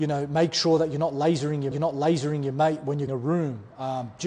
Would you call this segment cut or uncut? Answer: cut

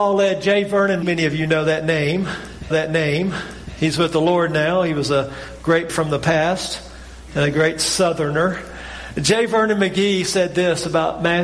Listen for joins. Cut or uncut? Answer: cut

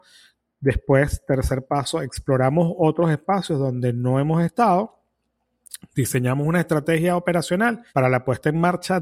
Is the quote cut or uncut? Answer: cut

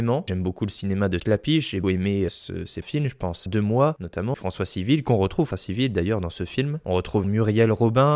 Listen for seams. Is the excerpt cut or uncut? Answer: cut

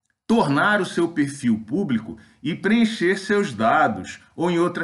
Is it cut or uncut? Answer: uncut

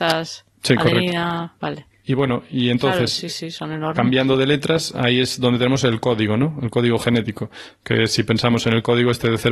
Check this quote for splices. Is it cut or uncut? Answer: cut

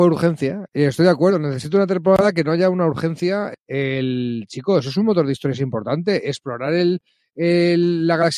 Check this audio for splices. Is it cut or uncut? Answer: uncut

